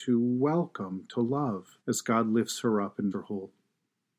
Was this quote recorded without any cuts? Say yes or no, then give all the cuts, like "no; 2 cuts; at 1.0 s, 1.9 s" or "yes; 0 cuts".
no; 2 cuts; at 1.8 s, 3.1 s